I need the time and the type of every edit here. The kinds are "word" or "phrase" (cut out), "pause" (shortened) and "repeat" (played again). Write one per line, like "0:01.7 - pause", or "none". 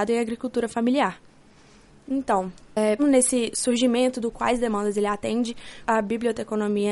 0:03.0 - word
0:04.3 - word
0:05.8 - word